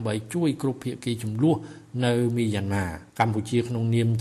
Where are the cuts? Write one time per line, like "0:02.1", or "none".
0:03.1